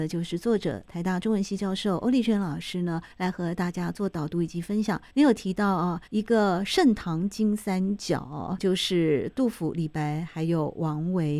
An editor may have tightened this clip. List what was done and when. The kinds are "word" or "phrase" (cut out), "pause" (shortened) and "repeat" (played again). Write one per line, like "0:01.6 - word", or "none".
0:03.1 - pause
0:05.1 - pause
0:06.1 - pause
0:08.6 - word